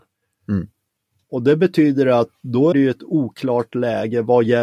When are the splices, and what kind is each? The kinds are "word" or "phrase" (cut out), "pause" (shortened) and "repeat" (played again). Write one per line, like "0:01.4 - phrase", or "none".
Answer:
0:02.7 - word